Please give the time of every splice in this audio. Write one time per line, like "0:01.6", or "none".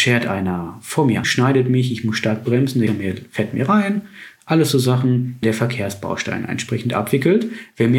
0:01.2
0:02.9
0:05.4